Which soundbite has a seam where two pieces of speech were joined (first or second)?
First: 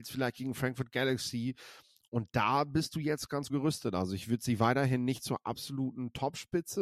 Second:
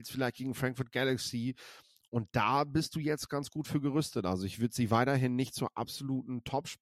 first